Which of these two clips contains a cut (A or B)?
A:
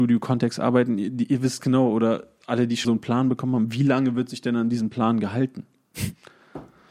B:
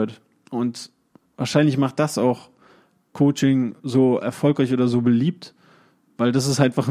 A